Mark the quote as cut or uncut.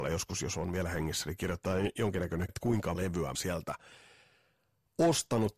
cut